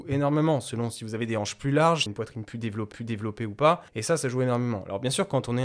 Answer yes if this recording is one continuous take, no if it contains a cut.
no